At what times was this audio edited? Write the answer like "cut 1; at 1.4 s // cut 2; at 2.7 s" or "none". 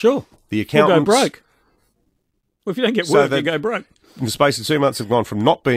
none

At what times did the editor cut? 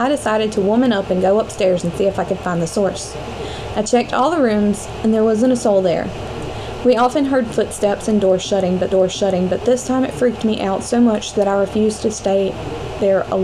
cut 1; at 8.9 s

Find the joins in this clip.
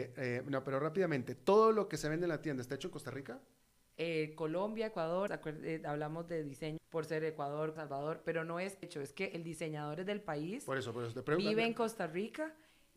cut 1; at 5.3 s // cut 2; at 6.8 s // cut 3; at 7.8 s // cut 4; at 8.8 s

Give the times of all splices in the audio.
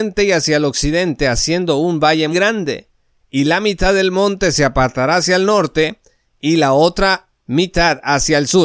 cut 1; at 2.3 s

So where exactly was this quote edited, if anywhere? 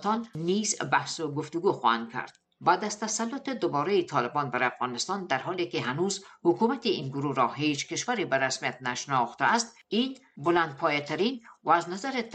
none

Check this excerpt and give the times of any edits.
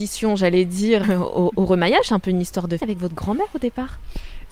cut 1; at 1.0 s // cut 2; at 2.8 s

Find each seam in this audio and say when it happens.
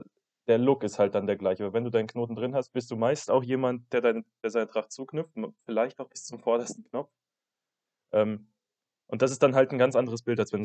none

